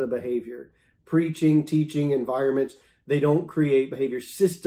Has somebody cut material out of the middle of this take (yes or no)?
no